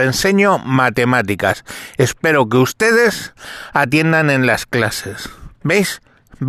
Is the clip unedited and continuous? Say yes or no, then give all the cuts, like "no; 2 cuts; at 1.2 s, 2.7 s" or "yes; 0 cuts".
no; 1 cut; at 5.5 s